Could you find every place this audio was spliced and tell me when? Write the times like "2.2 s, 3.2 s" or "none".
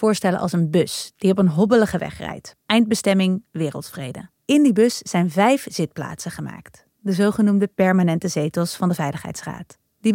2.6 s, 4.3 s